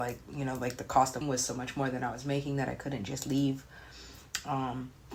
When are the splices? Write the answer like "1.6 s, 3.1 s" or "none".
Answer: 1.2 s